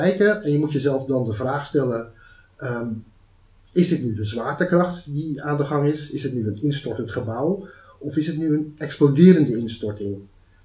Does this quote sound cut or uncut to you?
uncut